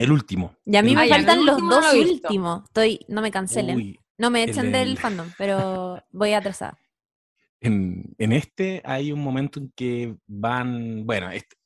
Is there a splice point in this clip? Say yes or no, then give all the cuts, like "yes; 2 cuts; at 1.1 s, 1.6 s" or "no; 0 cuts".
no; 0 cuts